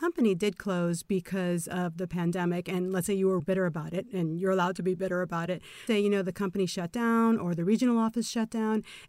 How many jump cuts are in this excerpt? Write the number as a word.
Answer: two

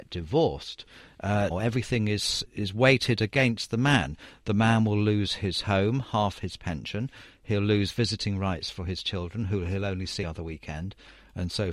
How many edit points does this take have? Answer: three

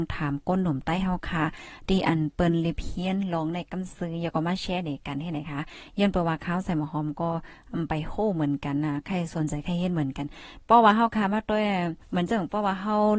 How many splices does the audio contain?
one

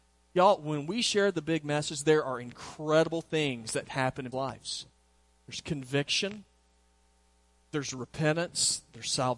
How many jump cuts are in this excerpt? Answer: one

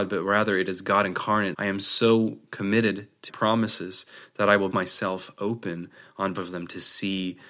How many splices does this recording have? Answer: four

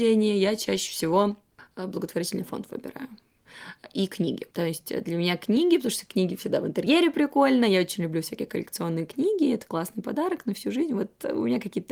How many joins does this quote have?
one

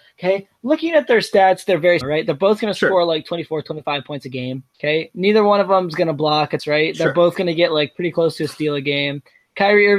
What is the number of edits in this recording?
three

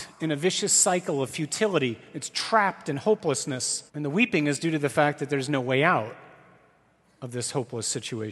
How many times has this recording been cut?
one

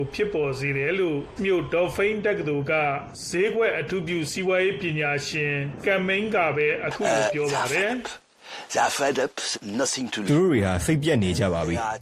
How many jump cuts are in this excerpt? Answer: four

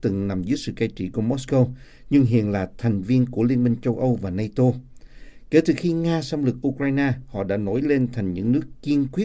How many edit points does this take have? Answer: zero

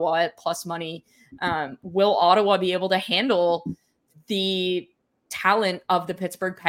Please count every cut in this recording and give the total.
zero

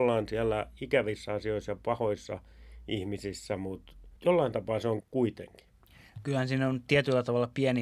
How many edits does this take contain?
two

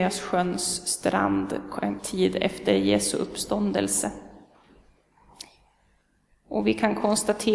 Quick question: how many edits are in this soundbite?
one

